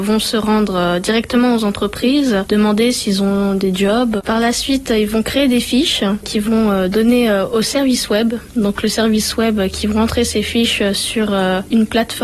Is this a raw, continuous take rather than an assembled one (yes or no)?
yes